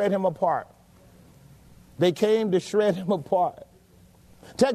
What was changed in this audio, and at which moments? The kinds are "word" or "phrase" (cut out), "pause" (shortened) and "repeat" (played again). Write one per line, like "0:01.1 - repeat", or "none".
none